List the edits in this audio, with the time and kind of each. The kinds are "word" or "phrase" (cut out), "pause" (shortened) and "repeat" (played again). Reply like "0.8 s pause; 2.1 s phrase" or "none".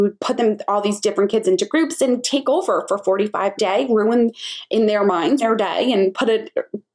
3.6 s phrase; 5.4 s word